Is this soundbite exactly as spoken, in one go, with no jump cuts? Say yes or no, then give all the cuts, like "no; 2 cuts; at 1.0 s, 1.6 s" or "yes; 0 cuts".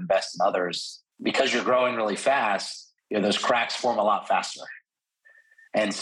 no; 2 cuts; at 1.1 s, 3.0 s